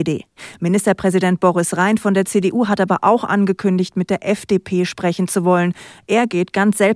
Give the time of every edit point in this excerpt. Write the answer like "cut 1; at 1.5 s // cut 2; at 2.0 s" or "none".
none